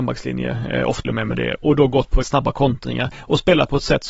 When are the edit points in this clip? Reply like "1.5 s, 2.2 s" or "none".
1.0 s, 1.6 s, 2.2 s